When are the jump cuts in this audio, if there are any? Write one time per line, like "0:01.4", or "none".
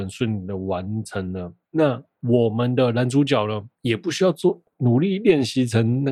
0:01.6
0:03.7